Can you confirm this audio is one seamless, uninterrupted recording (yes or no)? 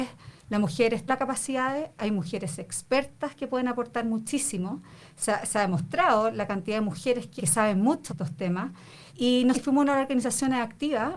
no